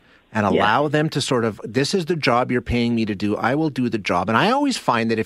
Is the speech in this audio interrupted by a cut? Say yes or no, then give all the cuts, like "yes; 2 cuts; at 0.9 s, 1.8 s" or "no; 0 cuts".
no; 0 cuts